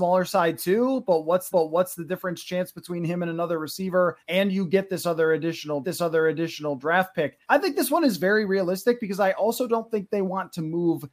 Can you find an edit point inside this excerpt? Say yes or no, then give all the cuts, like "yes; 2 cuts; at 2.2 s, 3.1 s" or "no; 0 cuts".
yes; 4 cuts; at 1.5 s, 4.2 s, 5.8 s, 7.4 s